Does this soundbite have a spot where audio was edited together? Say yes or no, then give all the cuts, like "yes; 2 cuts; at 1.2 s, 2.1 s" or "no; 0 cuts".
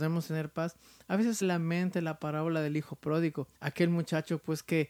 yes; 2 cuts; at 1.4 s, 3.5 s